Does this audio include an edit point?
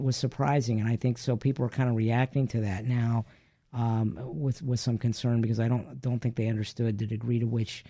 no; 0 cuts

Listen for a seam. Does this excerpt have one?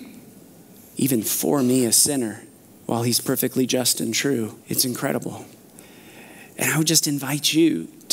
yes; 2 cuts; at 2.6 s, 4.6 s

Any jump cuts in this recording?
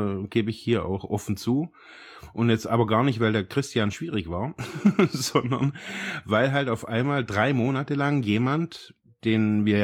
no; 0 cuts

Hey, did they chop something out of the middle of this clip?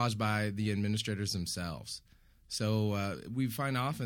no; 0 cuts

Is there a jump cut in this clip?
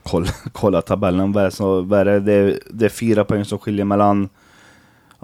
no; 0 cuts

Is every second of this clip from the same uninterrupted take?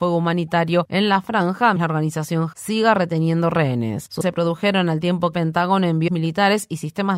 no; 5 cuts; at 1.8 s, 2.5 s, 4.2 s, 5.3 s, 6.1 s

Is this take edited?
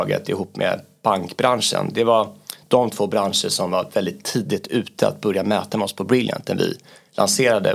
no; 0 cuts

